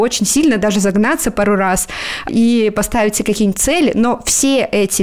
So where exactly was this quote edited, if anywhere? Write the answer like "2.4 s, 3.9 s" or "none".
2.3 s